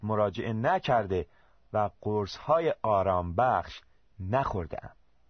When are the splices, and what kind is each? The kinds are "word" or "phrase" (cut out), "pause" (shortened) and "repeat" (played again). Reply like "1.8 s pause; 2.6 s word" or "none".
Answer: none